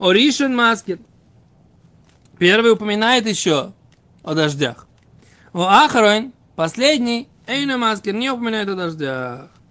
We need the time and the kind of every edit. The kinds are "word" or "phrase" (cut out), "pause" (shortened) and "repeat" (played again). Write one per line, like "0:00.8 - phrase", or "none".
none